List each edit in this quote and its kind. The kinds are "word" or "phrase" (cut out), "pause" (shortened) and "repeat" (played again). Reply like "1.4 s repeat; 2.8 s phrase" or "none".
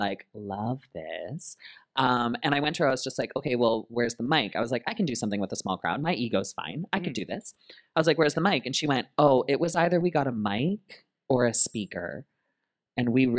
none